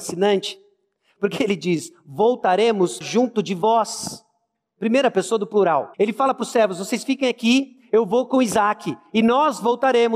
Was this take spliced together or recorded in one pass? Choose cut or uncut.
cut